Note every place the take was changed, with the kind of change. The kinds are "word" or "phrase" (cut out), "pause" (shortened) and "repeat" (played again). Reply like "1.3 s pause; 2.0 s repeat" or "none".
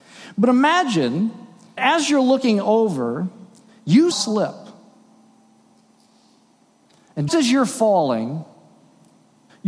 1.8 s word; 4.1 s word; 7.3 s word